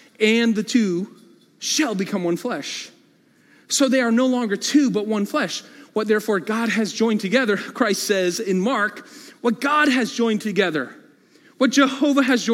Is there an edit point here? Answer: no; 0 cuts

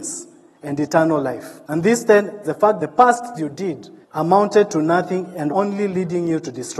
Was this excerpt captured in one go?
no; 6 cuts; at 1.6 s, 2.4 s, 2.8 s, 3.3 s, 4.0 s, 5.5 s

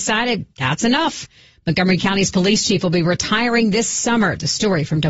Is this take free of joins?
yes; 0 cuts

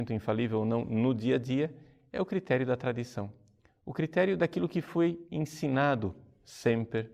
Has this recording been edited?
no; 0 cuts

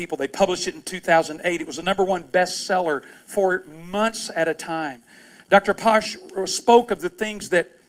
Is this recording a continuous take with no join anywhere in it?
yes; 0 cuts

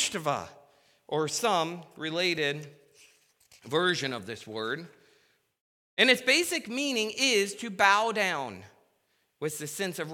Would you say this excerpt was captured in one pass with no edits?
yes; 0 cuts

